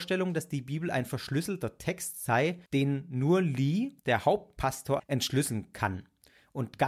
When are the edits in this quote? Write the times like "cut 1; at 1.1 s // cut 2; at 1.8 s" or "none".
cut 1; at 2.7 s // cut 2; at 4.0 s // cut 3; at 5.0 s